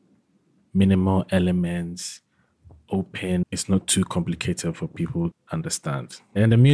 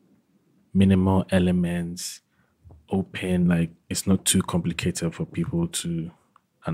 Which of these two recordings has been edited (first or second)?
first